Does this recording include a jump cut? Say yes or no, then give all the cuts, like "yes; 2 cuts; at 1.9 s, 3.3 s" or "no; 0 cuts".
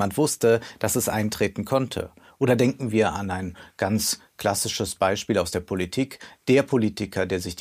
no; 0 cuts